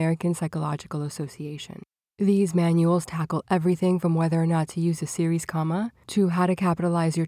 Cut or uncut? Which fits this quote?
uncut